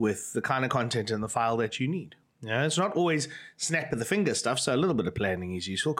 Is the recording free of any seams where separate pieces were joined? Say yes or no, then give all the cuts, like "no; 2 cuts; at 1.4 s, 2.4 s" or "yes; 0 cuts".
yes; 0 cuts